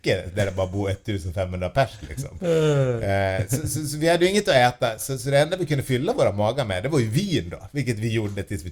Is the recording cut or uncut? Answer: uncut